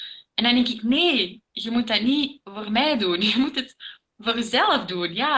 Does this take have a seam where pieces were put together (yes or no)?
no